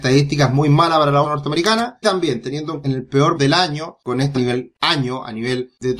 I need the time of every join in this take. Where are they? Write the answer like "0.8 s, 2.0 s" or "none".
1.2 s, 2.0 s, 2.8 s, 3.3 s, 4.3 s